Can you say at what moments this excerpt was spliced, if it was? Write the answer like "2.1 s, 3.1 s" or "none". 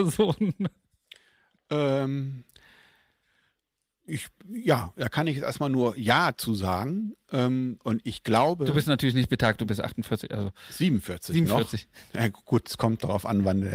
none